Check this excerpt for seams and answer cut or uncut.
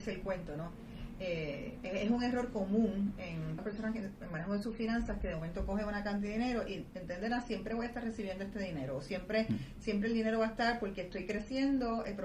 cut